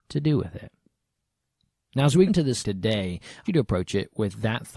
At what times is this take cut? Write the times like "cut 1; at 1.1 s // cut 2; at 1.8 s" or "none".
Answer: cut 1; at 2.3 s // cut 2; at 2.6 s // cut 3; at 3.5 s